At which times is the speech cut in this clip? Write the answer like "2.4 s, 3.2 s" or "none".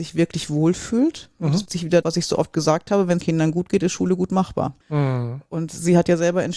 1.7 s, 2.0 s, 3.2 s, 4.8 s

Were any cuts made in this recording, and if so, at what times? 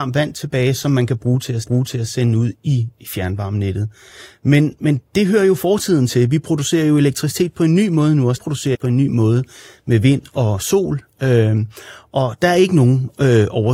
1.6 s, 8.4 s, 8.7 s

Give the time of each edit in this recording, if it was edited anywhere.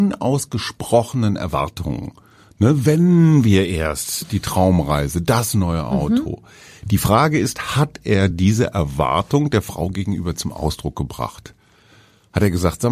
none

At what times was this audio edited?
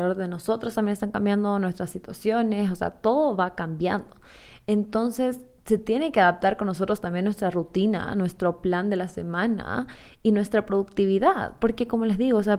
none

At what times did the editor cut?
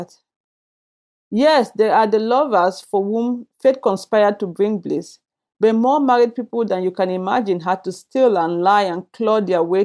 none

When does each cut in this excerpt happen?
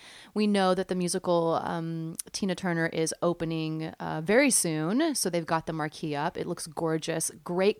none

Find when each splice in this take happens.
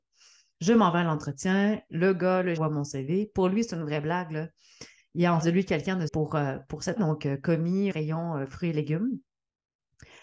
2.6 s, 5.4 s, 6.1 s, 7.0 s, 7.9 s

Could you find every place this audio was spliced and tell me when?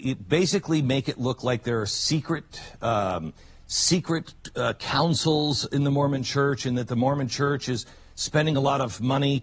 none

